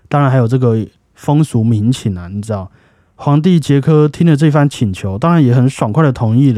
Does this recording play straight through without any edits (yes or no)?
yes